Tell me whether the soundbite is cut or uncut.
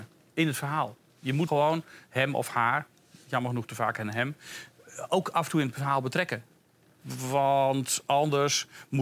cut